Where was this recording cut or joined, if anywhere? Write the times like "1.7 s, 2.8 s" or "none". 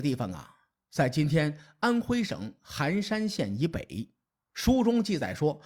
4.3 s